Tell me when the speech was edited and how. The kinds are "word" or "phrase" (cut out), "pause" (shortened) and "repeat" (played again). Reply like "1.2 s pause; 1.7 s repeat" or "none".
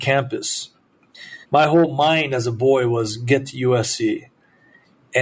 1.4 s pause